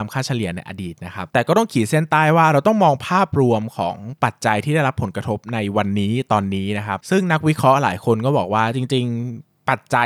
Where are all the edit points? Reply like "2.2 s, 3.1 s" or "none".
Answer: 1.3 s

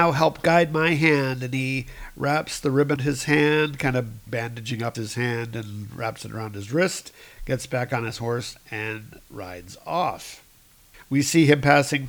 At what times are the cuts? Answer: 3.0 s, 4.3 s, 4.9 s

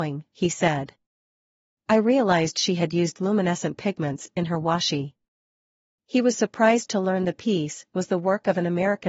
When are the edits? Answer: none

